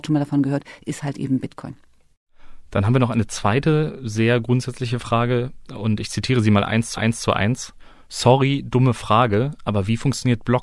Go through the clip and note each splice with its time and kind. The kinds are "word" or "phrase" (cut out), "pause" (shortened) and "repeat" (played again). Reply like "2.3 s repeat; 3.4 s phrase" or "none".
6.9 s repeat